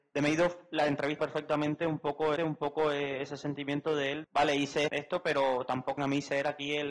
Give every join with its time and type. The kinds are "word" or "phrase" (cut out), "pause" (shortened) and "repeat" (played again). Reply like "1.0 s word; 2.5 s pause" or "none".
1.2 s word; 2.4 s repeat; 4.2 s word; 4.9 s word; 6.0 s phrase